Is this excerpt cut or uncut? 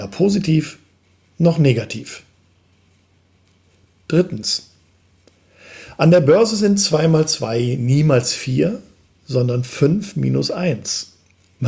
uncut